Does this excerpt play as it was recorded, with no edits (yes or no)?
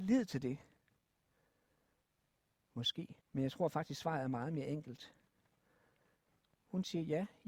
no